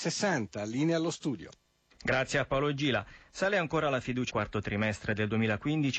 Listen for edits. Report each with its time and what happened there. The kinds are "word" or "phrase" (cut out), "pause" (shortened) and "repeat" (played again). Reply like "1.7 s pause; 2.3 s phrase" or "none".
4.3 s phrase

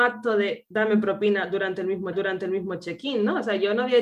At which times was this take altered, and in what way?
2.1 s repeat

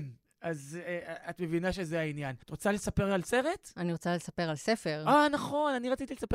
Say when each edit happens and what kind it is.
2.4 s pause

